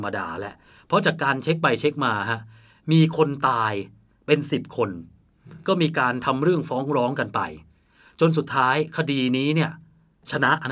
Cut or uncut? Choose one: uncut